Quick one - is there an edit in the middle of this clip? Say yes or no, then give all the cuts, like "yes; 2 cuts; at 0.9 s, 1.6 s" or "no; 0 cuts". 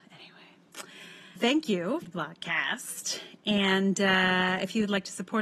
yes; 2 cuts; at 1.4 s, 2.0 s